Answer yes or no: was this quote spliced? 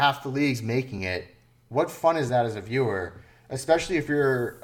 no